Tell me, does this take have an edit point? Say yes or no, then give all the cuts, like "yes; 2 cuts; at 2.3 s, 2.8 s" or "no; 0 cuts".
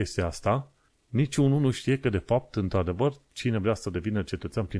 no; 0 cuts